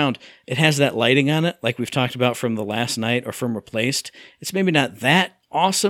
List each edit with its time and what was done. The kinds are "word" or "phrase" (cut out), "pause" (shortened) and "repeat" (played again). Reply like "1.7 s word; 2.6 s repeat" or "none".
none